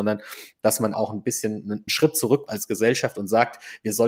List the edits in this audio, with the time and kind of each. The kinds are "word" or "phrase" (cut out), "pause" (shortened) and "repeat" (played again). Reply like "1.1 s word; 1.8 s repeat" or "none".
0.9 s word; 1.9 s word; 2.5 s word

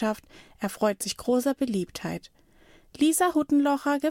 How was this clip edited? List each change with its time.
none

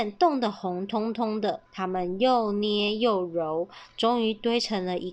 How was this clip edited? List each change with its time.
1.7 s pause

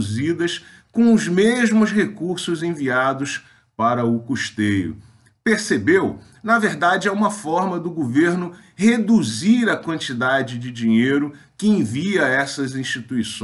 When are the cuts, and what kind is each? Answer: none

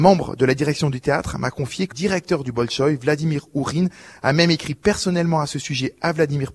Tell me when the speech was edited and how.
1.9 s word

